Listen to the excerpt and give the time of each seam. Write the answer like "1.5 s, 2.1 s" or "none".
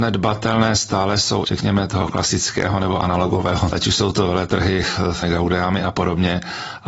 1.4 s, 3.7 s, 5.2 s